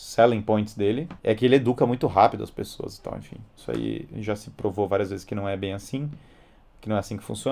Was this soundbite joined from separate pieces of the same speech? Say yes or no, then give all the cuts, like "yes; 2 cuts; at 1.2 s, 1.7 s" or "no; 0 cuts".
yes; 1 cut; at 1.2 s